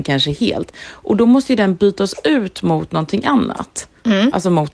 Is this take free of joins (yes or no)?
yes